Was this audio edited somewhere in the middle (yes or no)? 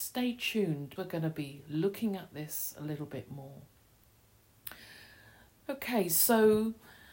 yes